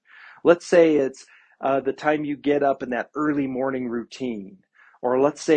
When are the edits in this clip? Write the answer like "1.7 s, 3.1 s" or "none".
none